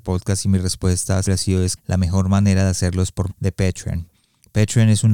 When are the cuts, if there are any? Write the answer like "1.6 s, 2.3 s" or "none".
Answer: 1.2 s, 1.8 s, 3.3 s